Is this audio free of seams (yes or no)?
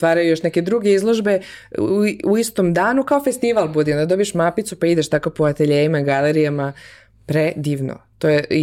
yes